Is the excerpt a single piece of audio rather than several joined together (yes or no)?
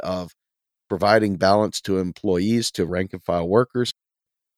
yes